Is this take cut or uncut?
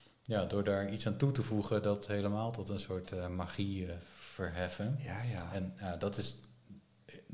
uncut